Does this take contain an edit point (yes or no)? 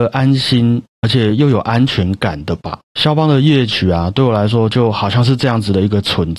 yes